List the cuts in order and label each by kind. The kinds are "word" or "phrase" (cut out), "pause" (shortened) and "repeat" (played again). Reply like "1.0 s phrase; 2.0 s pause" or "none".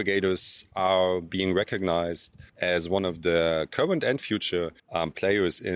2.5 s pause; 4.8 s pause